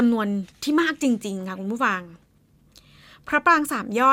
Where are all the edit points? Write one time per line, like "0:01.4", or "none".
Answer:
none